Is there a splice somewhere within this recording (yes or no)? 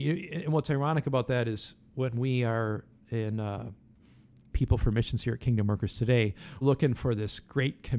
yes